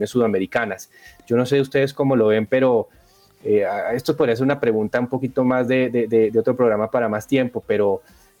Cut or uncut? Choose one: uncut